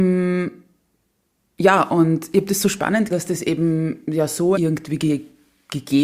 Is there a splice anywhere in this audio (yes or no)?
yes